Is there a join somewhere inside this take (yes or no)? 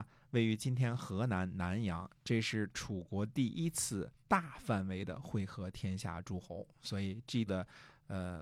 yes